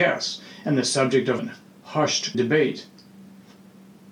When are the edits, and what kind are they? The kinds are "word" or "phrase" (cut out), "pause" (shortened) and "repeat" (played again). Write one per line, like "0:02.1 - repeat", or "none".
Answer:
0:01.4 - phrase
0:02.3 - word